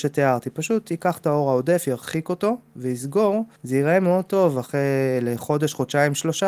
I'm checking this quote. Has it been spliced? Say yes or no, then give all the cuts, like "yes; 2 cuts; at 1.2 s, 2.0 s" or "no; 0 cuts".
yes; 1 cut; at 3.6 s